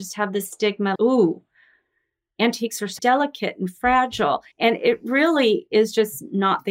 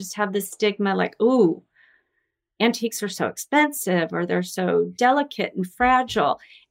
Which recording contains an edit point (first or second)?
first